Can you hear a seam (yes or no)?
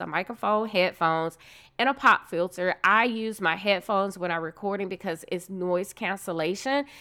no